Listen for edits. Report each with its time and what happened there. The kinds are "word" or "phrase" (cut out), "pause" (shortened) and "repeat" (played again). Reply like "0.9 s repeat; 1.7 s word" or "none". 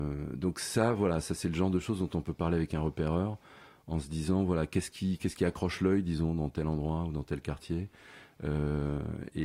none